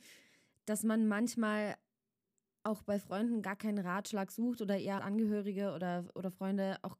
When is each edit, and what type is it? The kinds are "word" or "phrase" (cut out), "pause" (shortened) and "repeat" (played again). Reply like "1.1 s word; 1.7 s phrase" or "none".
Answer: 5.0 s word